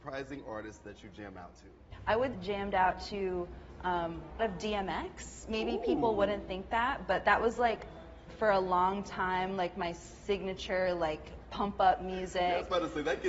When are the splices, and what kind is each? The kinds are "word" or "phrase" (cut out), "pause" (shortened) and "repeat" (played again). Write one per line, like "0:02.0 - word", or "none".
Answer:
0:02.3 - phrase
0:04.4 - phrase